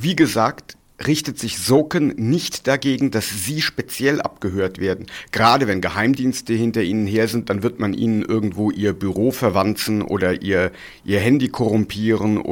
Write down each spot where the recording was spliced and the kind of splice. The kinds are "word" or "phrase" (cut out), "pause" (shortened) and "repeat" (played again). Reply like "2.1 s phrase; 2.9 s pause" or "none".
none